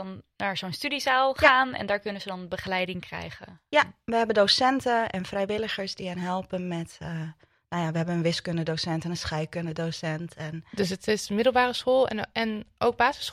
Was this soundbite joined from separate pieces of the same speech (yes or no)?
no